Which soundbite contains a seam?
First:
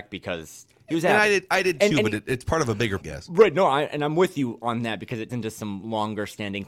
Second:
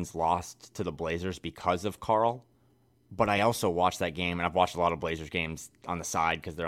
first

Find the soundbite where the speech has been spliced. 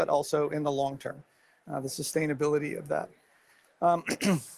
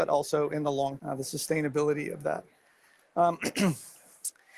second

